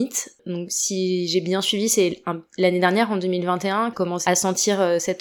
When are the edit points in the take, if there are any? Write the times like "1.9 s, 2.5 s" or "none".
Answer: 3.9 s, 4.3 s